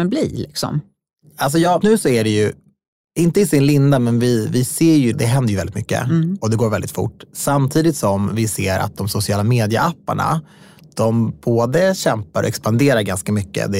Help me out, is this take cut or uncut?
cut